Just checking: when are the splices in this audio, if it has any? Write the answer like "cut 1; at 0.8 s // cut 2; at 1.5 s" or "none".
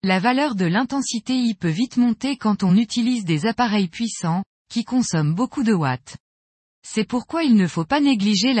none

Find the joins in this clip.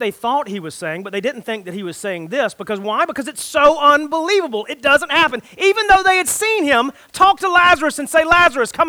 none

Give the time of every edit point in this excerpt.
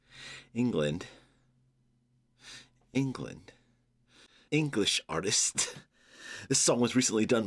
cut 1; at 4.5 s

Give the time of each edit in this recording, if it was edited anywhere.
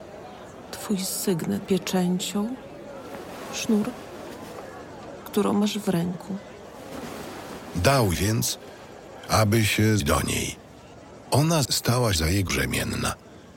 cut 1; at 1.7 s // cut 2; at 5.2 s // cut 3; at 8.1 s // cut 4; at 10.0 s // cut 5; at 11.6 s // cut 6; at 12.1 s // cut 7; at 12.5 s

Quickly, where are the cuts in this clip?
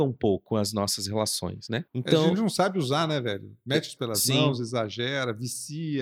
cut 1; at 1.9 s // cut 2; at 4.0 s

